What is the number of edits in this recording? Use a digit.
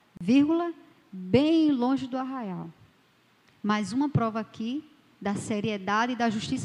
0